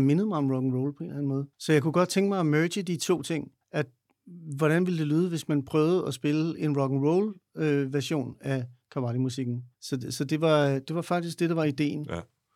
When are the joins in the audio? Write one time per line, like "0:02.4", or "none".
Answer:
0:01.5
0:03.6
0:09.7